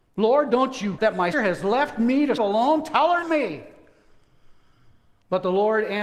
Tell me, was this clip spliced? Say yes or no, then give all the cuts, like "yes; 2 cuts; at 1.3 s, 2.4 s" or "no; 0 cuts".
yes; 4 cuts; at 1.0 s, 1.3 s, 2.4 s, 3.2 s